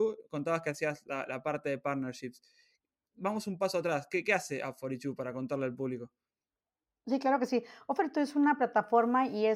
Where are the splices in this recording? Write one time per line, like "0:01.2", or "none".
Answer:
none